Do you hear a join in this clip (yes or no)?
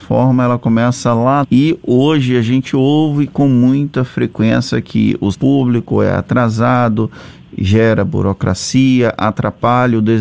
yes